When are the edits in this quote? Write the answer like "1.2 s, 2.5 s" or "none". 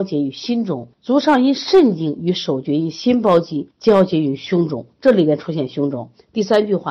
0.9 s, 3.7 s